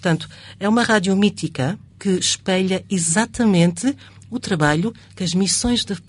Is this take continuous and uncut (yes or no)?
no